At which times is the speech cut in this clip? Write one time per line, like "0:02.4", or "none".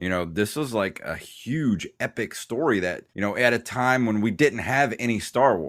0:03.1